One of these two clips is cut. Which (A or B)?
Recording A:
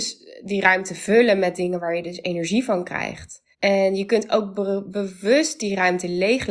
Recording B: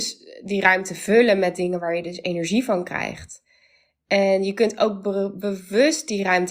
A